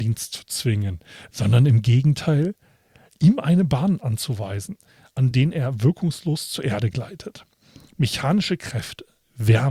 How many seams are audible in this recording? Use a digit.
0